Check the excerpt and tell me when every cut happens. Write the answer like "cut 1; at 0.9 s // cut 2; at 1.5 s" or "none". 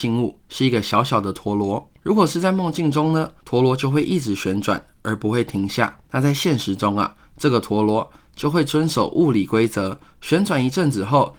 cut 1; at 2.0 s // cut 2; at 3.4 s // cut 3; at 6.0 s